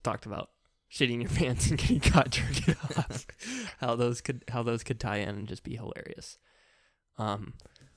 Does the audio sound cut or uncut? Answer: uncut